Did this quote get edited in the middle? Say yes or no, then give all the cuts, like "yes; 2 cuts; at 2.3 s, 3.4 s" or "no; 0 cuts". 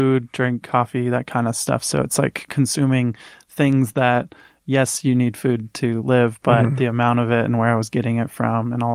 no; 0 cuts